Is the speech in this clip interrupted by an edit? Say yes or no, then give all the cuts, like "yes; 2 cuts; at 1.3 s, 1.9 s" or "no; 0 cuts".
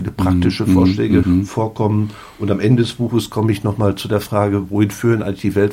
yes; 1 cut; at 1.2 s